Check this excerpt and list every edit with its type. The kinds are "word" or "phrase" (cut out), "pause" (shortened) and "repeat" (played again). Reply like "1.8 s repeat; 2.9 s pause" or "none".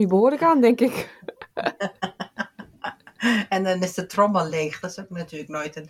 none